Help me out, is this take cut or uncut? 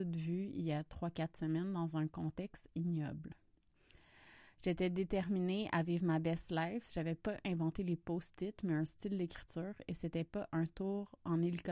uncut